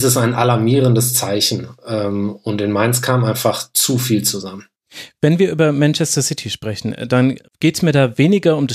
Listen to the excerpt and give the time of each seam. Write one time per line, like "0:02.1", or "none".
0:07.5